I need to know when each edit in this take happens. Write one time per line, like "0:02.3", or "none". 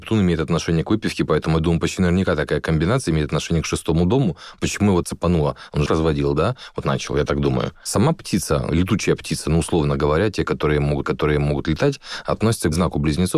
0:05.0
0:05.9
0:06.8
0:11.0